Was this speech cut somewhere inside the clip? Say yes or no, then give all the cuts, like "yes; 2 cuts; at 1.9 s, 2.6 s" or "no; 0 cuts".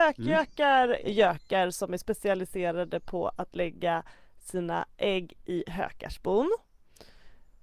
no; 0 cuts